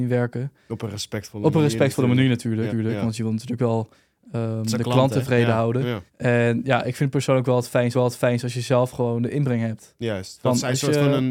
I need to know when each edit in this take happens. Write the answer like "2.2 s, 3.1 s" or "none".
2.7 s, 6.1 s, 7.9 s